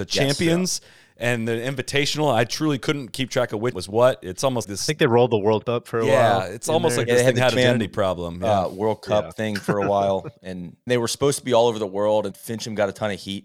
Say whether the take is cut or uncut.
cut